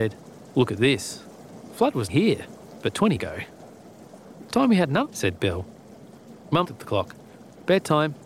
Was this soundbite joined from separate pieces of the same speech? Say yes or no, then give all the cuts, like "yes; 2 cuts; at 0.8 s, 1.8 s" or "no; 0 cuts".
yes; 4 cuts; at 2.1 s, 3.2 s, 5.0 s, 6.6 s